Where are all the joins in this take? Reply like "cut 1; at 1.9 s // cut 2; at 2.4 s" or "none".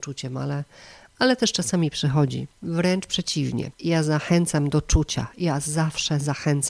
cut 1; at 2.5 s // cut 2; at 3.7 s